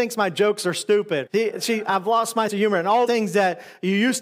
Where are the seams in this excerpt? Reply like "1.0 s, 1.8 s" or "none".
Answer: 1.3 s, 2.5 s, 3.1 s